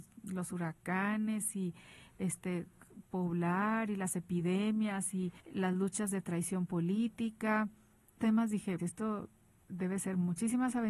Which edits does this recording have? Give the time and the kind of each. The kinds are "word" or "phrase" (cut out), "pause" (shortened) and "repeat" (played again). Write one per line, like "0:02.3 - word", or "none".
0:05.4 - pause
0:08.2 - word
0:08.8 - word